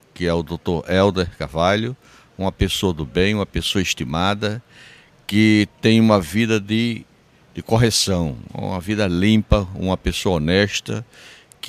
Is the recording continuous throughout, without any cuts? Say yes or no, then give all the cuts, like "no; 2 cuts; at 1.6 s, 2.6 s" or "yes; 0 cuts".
yes; 0 cuts